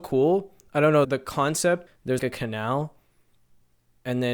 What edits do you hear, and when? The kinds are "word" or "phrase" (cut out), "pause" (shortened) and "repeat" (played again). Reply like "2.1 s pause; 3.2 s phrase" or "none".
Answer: 1.0 s word; 1.9 s word; 2.2 s word